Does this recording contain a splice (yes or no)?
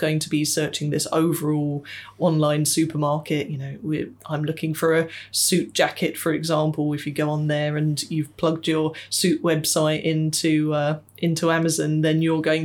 no